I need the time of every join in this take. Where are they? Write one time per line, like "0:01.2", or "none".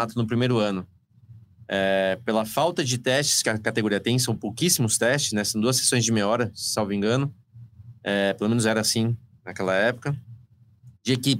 none